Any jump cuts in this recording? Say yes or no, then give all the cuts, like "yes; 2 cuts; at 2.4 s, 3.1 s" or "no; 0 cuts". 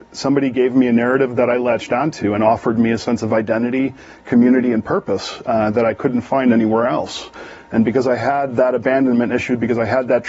no; 0 cuts